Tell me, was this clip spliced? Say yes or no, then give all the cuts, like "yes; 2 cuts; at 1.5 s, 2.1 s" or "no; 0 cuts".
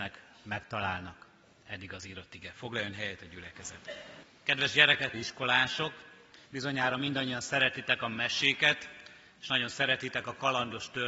yes; 2 cuts; at 5.1 s, 6.5 s